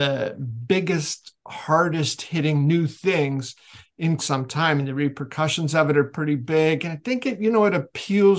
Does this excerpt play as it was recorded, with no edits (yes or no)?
no